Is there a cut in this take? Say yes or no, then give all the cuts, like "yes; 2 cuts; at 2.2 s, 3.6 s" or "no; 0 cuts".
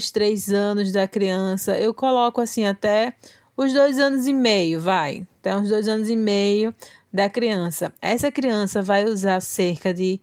no; 0 cuts